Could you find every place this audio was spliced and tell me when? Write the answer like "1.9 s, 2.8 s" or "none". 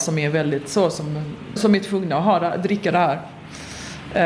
1.6 s